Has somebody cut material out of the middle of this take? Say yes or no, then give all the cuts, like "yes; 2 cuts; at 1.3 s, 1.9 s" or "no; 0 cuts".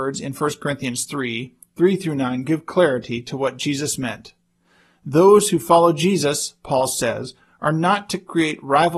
no; 0 cuts